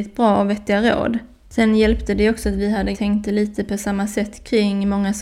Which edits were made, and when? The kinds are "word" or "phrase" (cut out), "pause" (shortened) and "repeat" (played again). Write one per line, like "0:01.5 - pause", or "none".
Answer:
0:02.9 - phrase

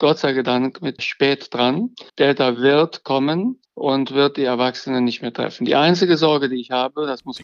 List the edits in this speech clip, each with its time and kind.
0:01.0 - word
0:02.1 - pause
0:03.6 - pause

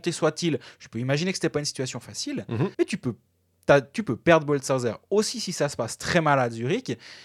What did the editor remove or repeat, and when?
0:02.7 - pause

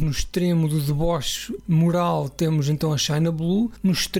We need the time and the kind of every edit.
none

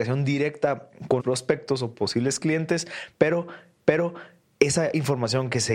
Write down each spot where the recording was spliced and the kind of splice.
0:01.2 - phrase
0:03.8 - repeat

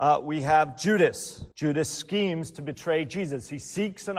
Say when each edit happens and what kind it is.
0:01.5 - pause

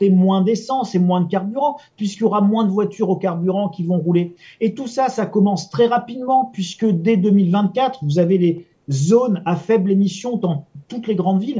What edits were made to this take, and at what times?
none

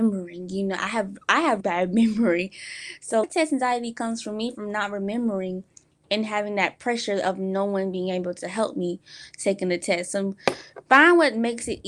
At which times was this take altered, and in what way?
0:01.6 - word
0:03.2 - word

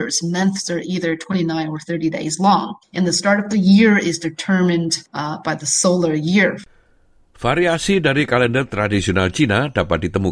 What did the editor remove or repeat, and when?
none

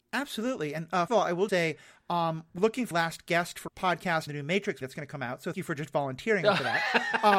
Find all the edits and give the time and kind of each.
0:01.1 - word
0:01.5 - word
0:02.6 - word
0:02.9 - word
0:03.7 - word
0:04.3 - word
0:04.8 - word
0:05.5 - word

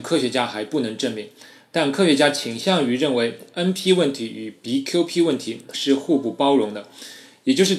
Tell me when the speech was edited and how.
none

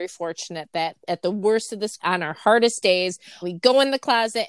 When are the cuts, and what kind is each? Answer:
0:02.0 - word
0:03.4 - word

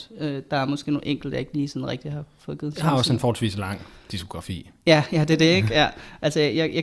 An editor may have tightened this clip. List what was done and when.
none

